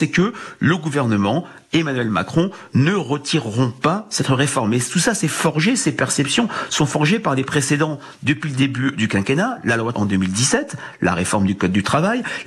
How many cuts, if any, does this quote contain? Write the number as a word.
one